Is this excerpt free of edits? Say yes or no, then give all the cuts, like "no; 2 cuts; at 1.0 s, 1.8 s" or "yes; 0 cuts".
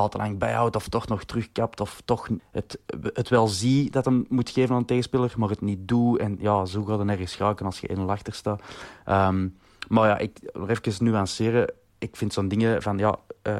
no; 1 cut; at 2.4 s